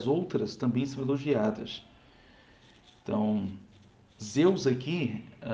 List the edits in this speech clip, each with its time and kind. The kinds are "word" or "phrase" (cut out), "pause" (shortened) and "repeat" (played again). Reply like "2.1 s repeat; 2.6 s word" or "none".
none